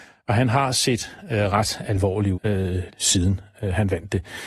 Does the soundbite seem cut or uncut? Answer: cut